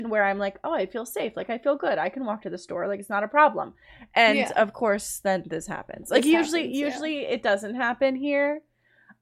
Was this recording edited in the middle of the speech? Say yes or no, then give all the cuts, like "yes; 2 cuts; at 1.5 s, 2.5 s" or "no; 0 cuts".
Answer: no; 0 cuts